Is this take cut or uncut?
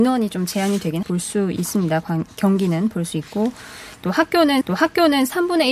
cut